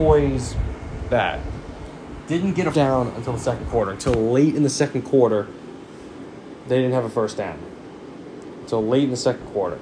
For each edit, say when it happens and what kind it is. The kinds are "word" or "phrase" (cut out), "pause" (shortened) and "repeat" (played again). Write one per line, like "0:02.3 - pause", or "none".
0:01.1 - word
0:02.7 - word